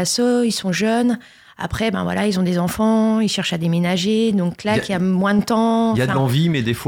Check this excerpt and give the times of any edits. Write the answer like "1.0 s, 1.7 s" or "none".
none